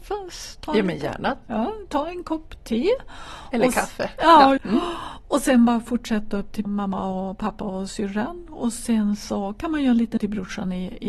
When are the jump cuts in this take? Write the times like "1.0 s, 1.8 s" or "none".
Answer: 4.6 s, 6.6 s, 10.2 s